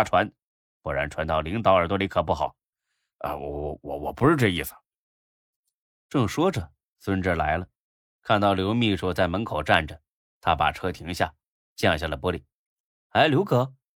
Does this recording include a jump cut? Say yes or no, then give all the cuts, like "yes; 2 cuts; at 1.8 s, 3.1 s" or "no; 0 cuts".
no; 0 cuts